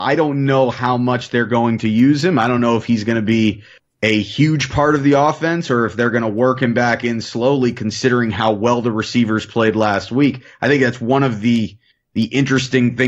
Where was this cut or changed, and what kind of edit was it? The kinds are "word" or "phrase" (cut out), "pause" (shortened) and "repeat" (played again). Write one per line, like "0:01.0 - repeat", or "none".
none